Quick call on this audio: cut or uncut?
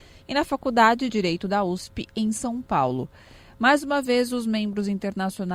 cut